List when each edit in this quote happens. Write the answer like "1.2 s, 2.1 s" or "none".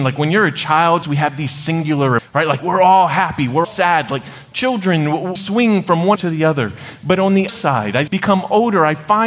1.0 s, 2.2 s, 2.6 s, 3.6 s, 5.3 s, 6.1 s, 7.5 s, 8.1 s